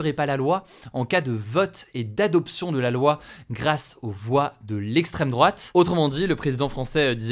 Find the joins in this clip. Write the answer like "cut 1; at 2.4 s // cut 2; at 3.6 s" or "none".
none